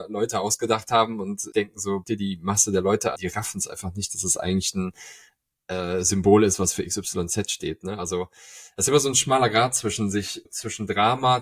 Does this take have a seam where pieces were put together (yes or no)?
yes